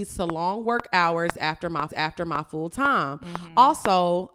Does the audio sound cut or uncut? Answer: cut